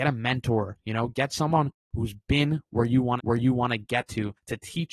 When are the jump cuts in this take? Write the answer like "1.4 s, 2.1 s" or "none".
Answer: 3.2 s